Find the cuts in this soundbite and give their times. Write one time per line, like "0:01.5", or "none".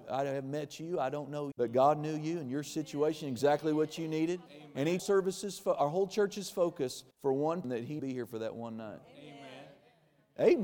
0:01.5
0:04.5
0:05.0
0:07.1
0:07.6
0:08.0